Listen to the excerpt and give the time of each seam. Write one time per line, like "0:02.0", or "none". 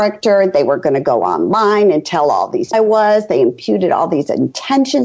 0:02.7